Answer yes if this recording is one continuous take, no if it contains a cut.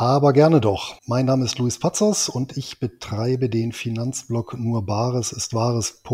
no